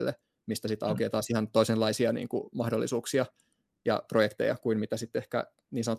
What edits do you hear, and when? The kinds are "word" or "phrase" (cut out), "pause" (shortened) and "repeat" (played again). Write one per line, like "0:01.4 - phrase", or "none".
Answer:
none